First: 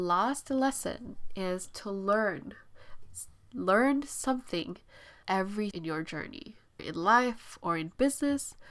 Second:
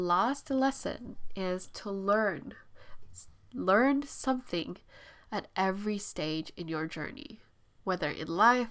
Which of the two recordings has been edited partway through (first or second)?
first